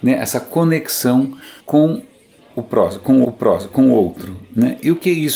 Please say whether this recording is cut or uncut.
cut